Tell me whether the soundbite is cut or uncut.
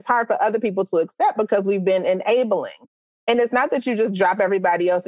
uncut